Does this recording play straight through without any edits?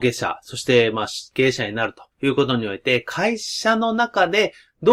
no; 1 cut; at 2.1 s

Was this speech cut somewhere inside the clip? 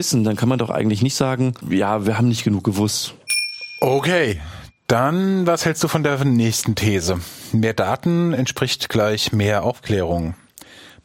no; 0 cuts

